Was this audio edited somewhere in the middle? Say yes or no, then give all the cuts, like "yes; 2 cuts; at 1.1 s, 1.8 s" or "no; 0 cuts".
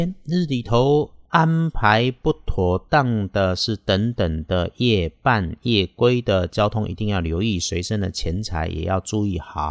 yes; 1 cut; at 1.2 s